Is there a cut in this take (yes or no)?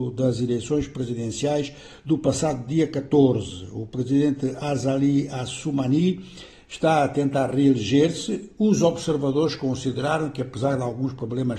no